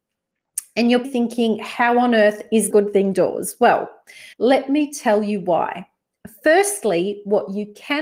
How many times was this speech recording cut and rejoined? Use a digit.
3